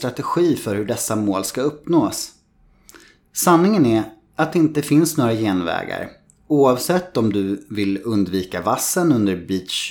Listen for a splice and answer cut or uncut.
uncut